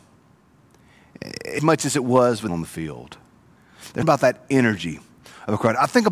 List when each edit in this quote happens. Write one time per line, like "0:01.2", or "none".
0:01.6
0:02.5
0:04.0